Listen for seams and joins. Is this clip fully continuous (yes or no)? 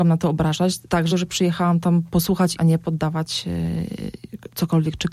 no